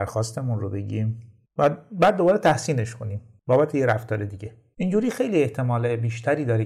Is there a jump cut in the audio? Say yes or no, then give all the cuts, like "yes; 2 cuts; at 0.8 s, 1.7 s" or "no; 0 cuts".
no; 0 cuts